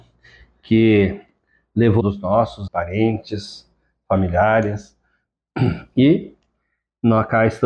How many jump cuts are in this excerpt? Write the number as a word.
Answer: two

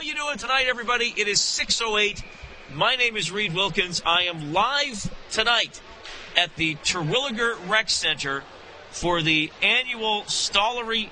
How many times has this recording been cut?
zero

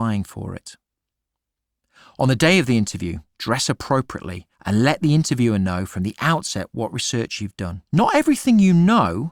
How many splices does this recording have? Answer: two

